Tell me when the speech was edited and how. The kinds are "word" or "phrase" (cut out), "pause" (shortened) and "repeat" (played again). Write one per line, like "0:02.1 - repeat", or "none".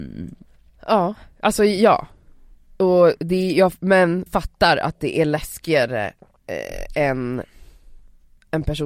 0:04.3 - word

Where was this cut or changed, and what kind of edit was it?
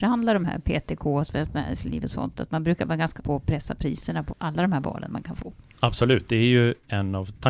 0:03.2 - word
0:04.3 - word

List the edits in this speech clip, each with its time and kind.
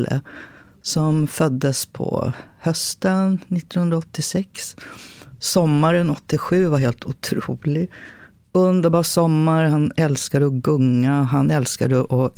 none

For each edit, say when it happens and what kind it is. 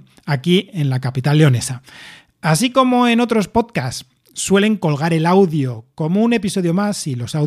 none

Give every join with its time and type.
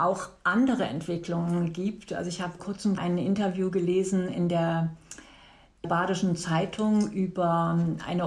0:02.6 - word
0:03.0 - word
0:05.8 - word

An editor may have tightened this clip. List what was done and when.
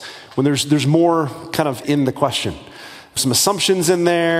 0:01.8 - word
0:03.2 - word

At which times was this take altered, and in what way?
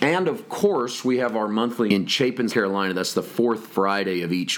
0:01.9 - word
0:02.5 - word

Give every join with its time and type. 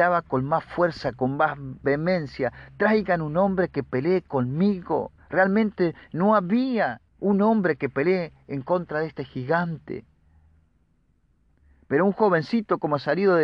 0:05.2 - pause
0:07.1 - pause

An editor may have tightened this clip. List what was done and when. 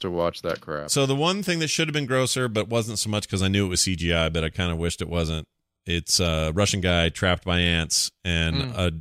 none

